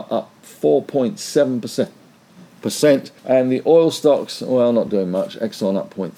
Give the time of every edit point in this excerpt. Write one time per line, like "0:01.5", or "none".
0:03.2